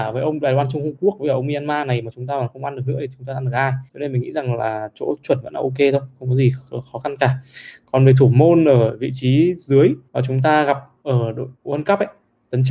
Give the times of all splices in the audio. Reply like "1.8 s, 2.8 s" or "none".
3.9 s, 10.1 s, 11.5 s